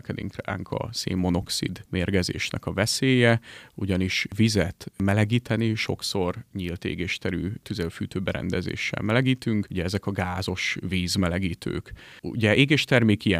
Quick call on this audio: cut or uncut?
uncut